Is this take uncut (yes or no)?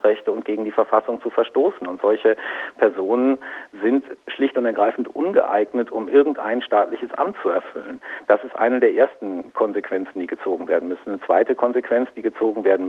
yes